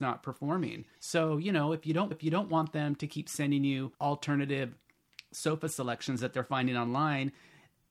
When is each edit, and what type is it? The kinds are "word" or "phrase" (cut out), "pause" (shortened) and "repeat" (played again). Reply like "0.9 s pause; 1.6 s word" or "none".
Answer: 0.9 s pause; 2.1 s repeat; 3.9 s pause